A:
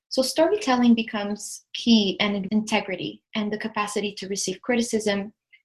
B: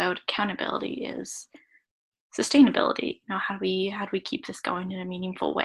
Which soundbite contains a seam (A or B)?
A